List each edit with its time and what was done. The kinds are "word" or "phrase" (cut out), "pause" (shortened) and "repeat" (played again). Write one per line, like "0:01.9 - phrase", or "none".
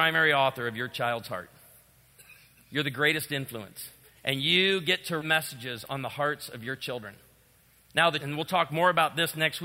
0:04.0 - pause
0:05.2 - word
0:08.2 - word